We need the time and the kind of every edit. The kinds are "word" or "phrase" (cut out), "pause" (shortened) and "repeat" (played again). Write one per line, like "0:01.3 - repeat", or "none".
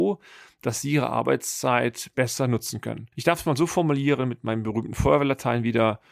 0:03.1 - pause